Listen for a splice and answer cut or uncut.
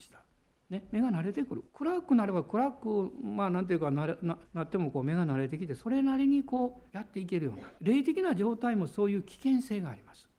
cut